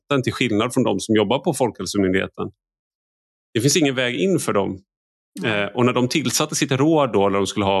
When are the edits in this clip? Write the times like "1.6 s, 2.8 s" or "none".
none